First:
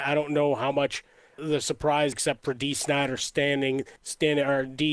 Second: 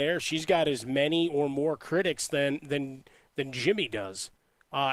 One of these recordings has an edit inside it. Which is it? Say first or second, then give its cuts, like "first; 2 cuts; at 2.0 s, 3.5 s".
first; 3 cuts; at 1.4 s, 2.1 s, 4.0 s